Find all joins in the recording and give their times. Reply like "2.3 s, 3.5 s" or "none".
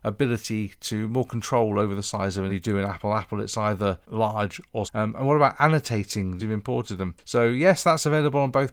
2.5 s, 4.0 s, 4.8 s, 6.4 s